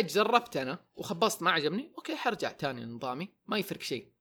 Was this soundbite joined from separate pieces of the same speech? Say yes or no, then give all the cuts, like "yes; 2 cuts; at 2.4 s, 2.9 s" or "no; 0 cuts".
no; 0 cuts